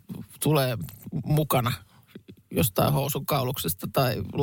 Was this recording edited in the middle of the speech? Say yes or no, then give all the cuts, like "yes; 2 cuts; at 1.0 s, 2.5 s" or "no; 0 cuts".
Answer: no; 0 cuts